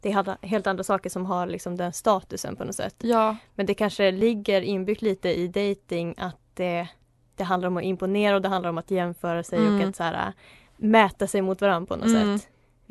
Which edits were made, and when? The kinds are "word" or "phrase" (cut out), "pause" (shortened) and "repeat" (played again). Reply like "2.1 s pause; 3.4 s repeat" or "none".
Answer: none